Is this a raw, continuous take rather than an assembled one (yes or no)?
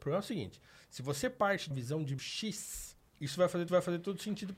no